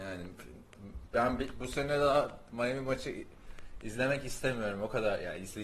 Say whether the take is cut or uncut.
cut